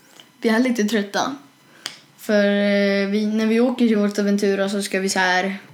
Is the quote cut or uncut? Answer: uncut